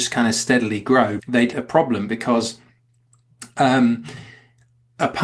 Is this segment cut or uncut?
cut